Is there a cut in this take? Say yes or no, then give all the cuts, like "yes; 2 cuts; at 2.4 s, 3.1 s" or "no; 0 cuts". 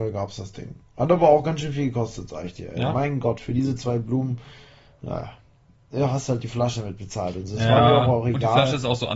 no; 0 cuts